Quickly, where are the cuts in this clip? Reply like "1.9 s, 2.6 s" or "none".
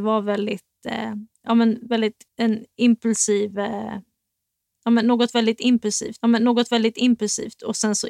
2.3 s, 6.2 s

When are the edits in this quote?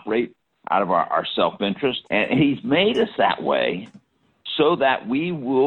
2.1 s

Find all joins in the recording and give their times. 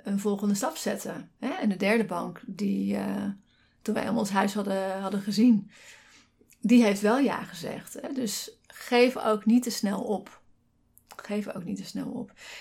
none

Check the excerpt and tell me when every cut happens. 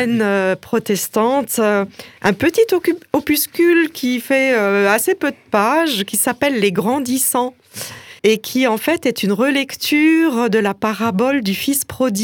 8.2 s

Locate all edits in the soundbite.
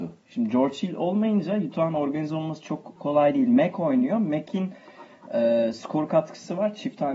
none

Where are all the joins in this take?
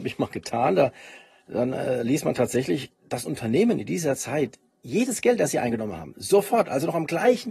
none

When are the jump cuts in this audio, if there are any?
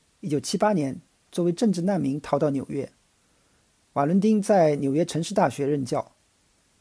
none

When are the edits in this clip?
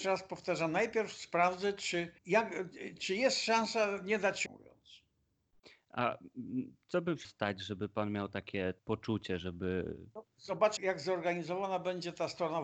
2.2 s, 4.5 s, 7.2 s, 8.8 s, 10.8 s

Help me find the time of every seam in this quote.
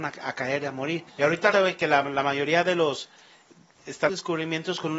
1.1 s, 1.5 s, 2.1 s, 4.1 s

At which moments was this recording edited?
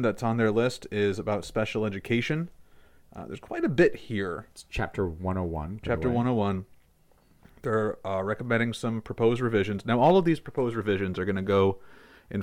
none

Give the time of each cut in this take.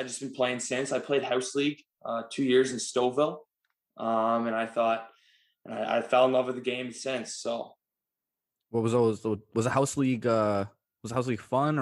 none

